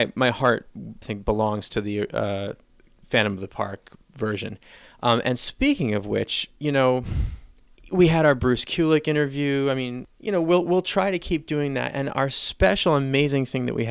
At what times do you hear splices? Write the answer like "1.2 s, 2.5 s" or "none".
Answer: 1.0 s